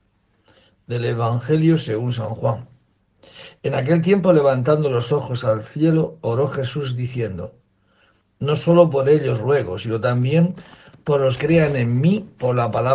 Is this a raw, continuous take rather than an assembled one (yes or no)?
no